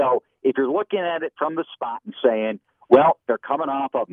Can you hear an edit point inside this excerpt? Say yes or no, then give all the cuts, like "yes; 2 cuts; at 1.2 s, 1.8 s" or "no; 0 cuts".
no; 0 cuts